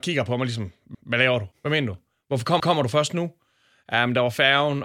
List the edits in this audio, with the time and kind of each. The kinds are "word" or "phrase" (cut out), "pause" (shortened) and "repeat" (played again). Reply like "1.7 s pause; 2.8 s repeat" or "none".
0.9 s repeat; 1.5 s pause; 2.6 s repeat